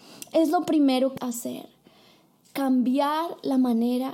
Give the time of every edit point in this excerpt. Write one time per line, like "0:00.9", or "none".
0:01.2